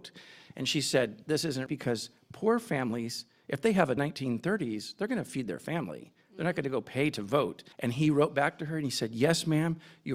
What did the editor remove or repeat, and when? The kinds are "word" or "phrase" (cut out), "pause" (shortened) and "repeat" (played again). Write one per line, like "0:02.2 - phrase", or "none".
0:01.7 - word
0:04.0 - phrase
0:07.7 - pause